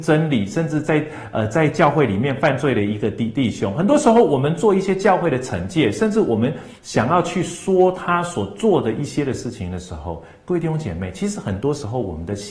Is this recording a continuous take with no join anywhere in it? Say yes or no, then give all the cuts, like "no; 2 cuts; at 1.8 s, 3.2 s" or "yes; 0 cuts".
no; 1 cut; at 6.8 s